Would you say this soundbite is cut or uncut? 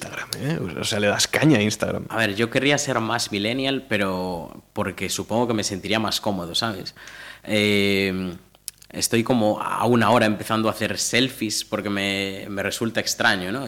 uncut